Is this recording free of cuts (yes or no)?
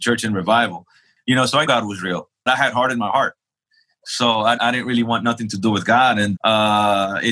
no